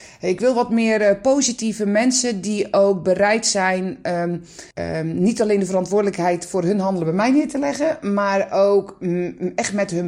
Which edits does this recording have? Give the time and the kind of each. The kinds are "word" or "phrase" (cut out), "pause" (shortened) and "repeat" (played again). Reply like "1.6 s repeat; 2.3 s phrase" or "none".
4.7 s pause